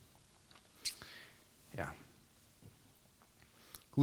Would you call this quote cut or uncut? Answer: uncut